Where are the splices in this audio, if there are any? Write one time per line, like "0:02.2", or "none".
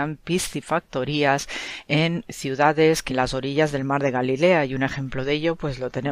0:03.1

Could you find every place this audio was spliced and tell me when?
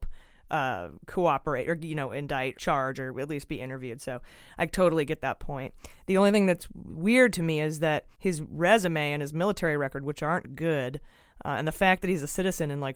0:01.0
0:02.5
0:08.1

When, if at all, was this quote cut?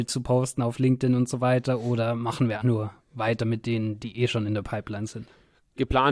0:02.6

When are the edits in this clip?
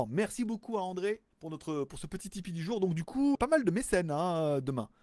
0:01.3
0:03.3

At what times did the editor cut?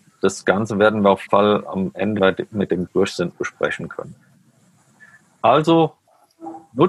0:01.3
0:02.2
0:02.9
0:03.3

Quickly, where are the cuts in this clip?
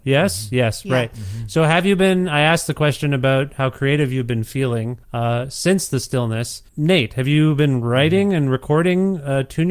0:05.0
0:06.7

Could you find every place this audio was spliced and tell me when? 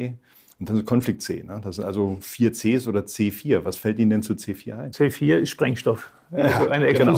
none

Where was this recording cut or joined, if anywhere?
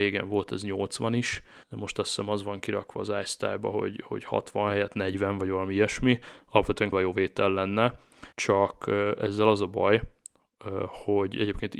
0:01.6
0:06.9
0:08.3

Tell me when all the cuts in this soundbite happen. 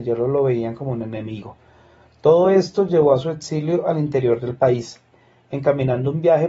none

